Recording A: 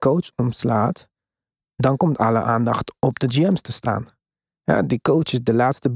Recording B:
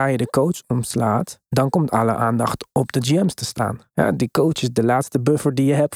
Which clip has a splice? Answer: B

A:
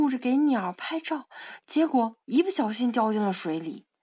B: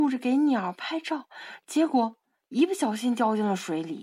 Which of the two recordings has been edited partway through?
A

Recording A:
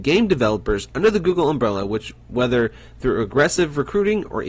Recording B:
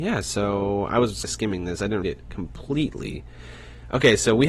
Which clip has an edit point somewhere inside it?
B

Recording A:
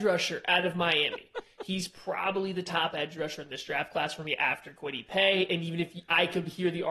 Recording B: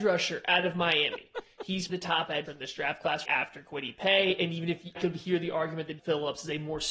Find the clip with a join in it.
B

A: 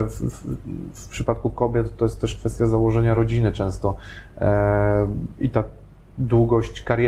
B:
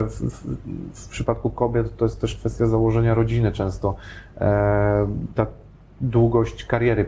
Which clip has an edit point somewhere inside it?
B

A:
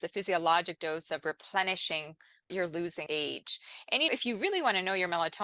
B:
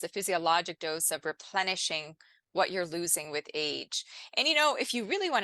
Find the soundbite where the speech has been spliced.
A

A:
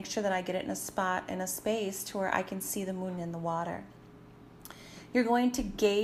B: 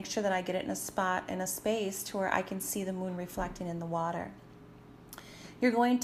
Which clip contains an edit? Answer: A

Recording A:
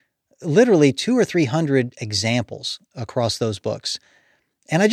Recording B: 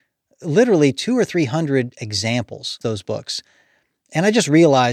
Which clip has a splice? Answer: B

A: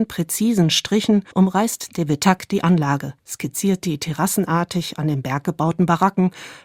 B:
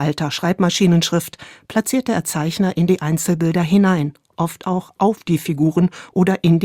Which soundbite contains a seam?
A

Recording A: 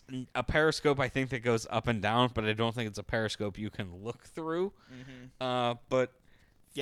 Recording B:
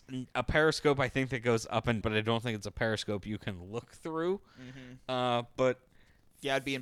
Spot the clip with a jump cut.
B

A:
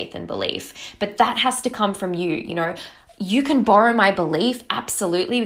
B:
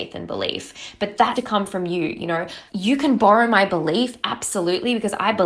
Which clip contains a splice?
B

